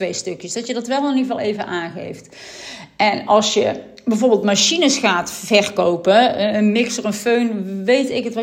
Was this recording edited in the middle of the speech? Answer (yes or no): no